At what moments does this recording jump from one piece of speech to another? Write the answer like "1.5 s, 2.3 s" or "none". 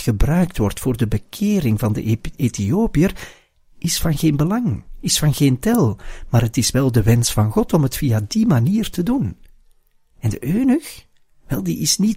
none